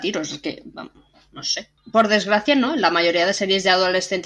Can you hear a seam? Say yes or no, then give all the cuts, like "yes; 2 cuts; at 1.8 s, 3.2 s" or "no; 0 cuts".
no; 0 cuts